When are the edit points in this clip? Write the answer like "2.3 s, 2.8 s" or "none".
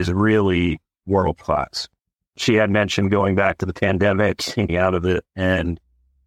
4.7 s